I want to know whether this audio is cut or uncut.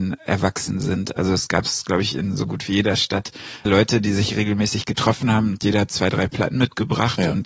cut